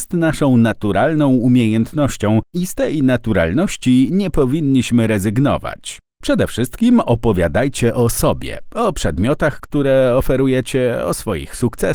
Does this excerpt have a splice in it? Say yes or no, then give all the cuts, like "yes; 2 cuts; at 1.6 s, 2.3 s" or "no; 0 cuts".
no; 0 cuts